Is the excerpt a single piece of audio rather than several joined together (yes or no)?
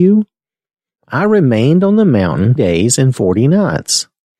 no